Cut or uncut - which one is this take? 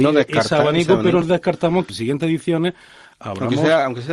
cut